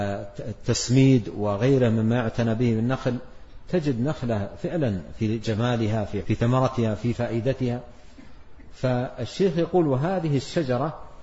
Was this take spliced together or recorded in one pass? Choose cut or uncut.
cut